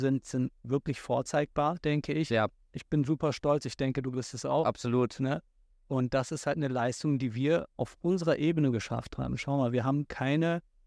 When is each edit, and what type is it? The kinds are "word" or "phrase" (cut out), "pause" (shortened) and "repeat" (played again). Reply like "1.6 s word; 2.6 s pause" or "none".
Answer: none